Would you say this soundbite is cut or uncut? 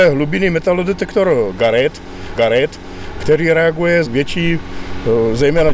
cut